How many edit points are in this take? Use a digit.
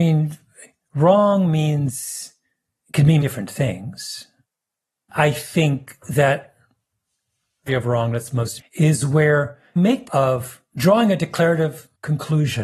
6